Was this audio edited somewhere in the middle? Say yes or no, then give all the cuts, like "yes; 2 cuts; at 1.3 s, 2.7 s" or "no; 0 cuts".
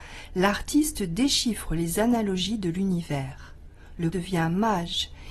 yes; 1 cut; at 4.1 s